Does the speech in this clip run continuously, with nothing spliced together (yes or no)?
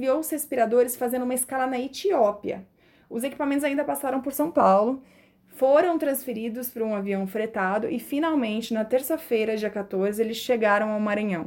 yes